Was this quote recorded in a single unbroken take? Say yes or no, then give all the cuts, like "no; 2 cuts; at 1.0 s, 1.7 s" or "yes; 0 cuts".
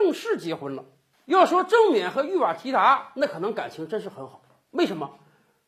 yes; 0 cuts